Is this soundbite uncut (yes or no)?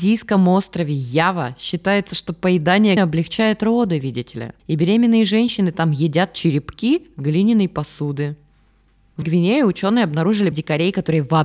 no